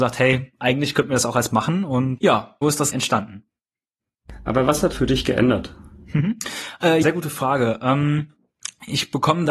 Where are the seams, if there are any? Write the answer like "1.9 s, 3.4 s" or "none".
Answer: 1.5 s, 2.2 s, 2.6 s, 2.9 s, 4.9 s, 7.0 s

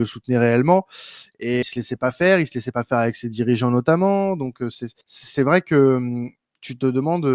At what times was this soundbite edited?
1.6 s, 5.0 s

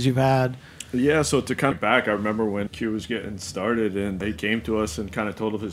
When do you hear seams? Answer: 1.7 s, 2.7 s, 4.2 s

